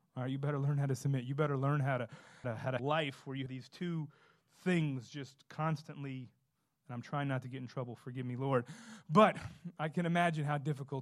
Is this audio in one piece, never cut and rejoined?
no; 3 cuts; at 2.4 s, 2.8 s, 3.5 s

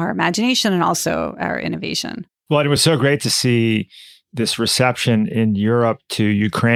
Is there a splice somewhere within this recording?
no; 0 cuts

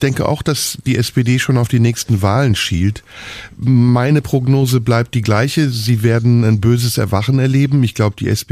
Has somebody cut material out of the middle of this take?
no; 0 cuts

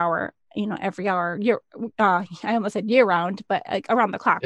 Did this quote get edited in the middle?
yes; 1 cut; at 1.9 s

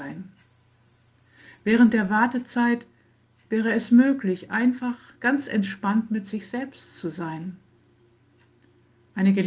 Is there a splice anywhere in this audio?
no; 0 cuts

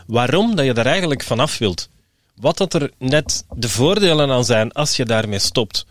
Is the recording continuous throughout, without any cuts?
yes; 0 cuts

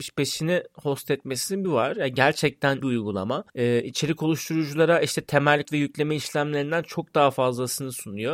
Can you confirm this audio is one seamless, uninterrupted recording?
no; 4 cuts; at 1.6 s, 2.8 s, 3.5 s, 5.6 s

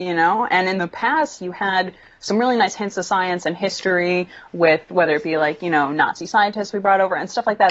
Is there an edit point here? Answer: yes; 1 cut; at 1.4 s

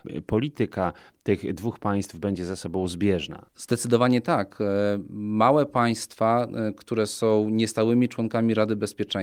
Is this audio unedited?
yes; 0 cuts

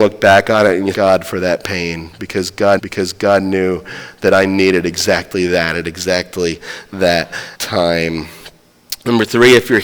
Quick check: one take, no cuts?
no; 3 cuts; at 0.9 s, 2.8 s, 7.5 s

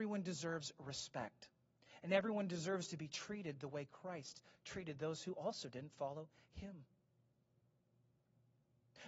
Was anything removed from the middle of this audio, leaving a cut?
no; 0 cuts

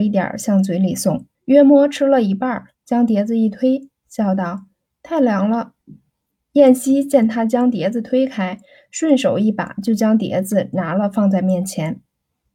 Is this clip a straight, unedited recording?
no; 4 cuts; at 1.3 s, 2.7 s, 4.7 s, 5.8 s

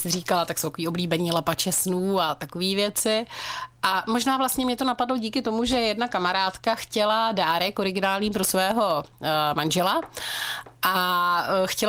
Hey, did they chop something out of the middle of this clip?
no; 0 cuts

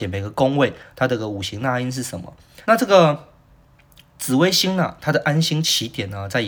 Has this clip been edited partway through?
yes; 1 cut; at 2.6 s

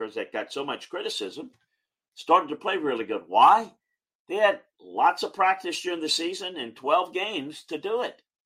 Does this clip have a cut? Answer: no; 0 cuts

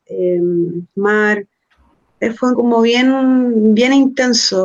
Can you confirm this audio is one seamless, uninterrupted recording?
no; 2 cuts; at 0.9 s, 2.5 s

